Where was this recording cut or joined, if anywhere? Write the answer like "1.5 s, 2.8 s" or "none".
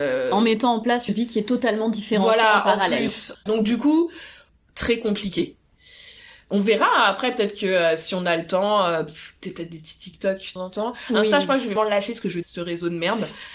1.1 s, 10.6 s, 11.8 s, 12.4 s